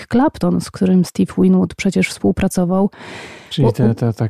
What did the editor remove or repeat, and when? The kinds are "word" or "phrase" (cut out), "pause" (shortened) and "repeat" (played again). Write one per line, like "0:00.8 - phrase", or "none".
none